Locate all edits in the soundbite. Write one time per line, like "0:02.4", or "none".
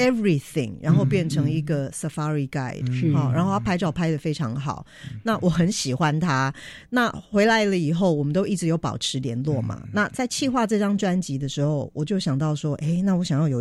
none